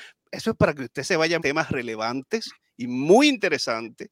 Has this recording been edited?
yes; 2 cuts; at 1.4 s, 2.6 s

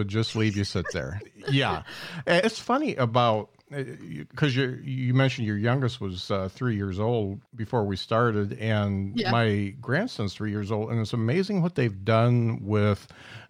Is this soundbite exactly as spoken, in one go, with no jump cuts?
no; 1 cut; at 7.5 s

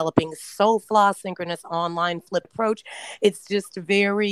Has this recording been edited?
yes; 1 cut; at 2.4 s

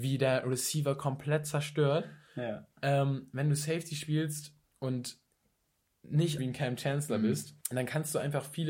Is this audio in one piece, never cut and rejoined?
no; 4 cuts; at 2.7 s, 4.6 s, 6.4 s, 7.6 s

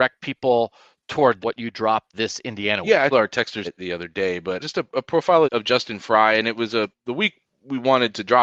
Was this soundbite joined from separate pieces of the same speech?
yes; 7 cuts; at 1.4 s, 2.1 s, 3.1 s, 3.6 s, 4.6 s, 5.4 s, 6.9 s

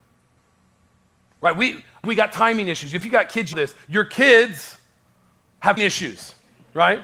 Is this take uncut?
no; 3 cuts; at 2.0 s, 3.5 s, 5.8 s

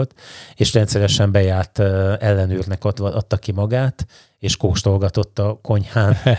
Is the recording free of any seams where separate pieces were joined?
yes; 0 cuts

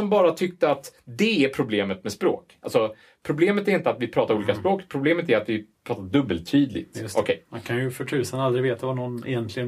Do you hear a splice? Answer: no; 0 cuts

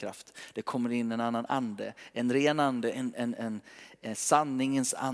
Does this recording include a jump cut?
no; 0 cuts

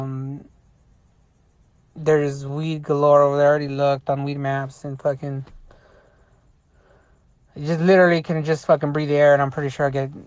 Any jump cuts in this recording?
no; 0 cuts

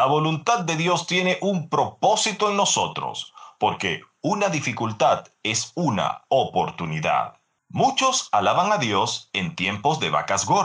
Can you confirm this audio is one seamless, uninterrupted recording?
yes; 0 cuts

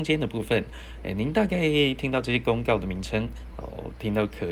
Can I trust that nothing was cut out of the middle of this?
yes; 0 cuts

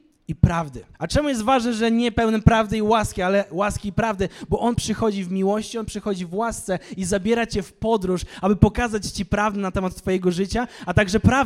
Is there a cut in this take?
yes; 1 cut; at 0.9 s

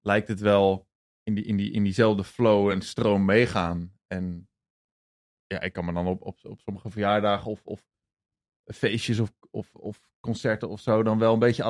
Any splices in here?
no; 0 cuts

